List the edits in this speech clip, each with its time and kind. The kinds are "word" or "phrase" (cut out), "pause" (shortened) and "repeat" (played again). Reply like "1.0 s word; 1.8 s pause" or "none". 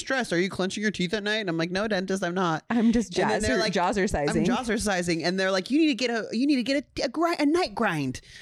none

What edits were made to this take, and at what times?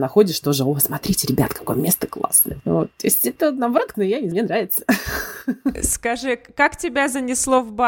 3.9 s word; 4.3 s word

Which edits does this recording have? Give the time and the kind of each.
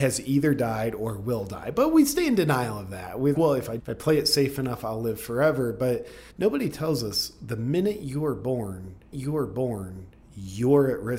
3.3 s word; 3.8 s word; 6.3 s pause; 9.1 s repeat

